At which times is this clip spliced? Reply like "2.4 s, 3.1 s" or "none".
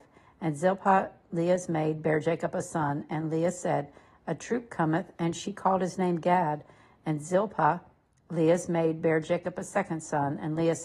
none